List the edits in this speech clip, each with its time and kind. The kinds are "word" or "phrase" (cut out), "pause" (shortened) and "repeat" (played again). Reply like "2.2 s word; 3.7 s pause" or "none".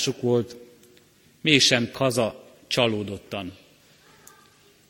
1.9 s word